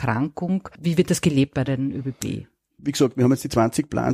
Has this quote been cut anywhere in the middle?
no; 0 cuts

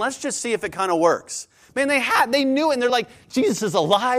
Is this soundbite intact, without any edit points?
yes; 0 cuts

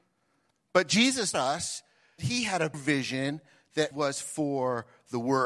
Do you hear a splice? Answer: yes; 4 cuts; at 1.3 s, 2.2 s, 2.7 s, 3.9 s

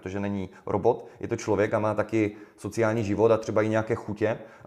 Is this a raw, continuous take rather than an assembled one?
yes; 0 cuts

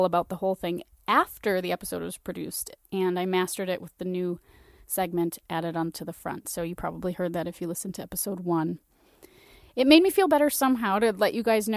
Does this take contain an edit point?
no; 0 cuts

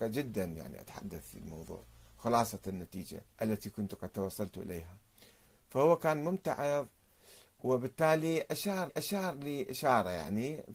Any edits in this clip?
yes; 2 cuts; at 3.3 s, 8.9 s

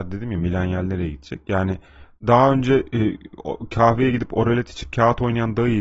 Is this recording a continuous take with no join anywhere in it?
yes; 0 cuts

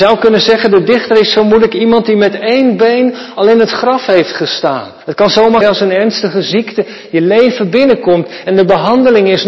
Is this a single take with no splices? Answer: no; 2 cuts; at 5.0 s, 5.6 s

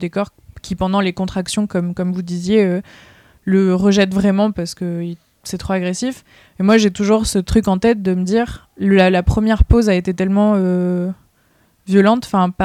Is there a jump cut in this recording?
no; 0 cuts

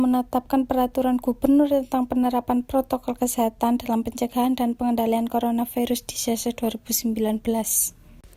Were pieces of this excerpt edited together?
no; 0 cuts

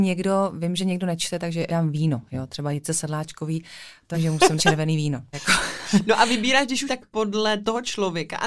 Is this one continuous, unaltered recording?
no; 5 cuts; at 1.7 s, 4.1 s, 4.6 s, 5.3 s, 6.9 s

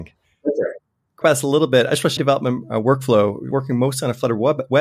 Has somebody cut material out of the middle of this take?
yes; 3 cuts; at 1.2 s, 2.2 s, 3.5 s

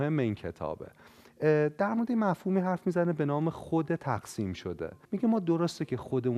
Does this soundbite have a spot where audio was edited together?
yes; 1 cut; at 5.0 s

